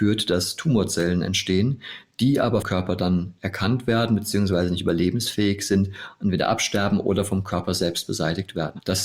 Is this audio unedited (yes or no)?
no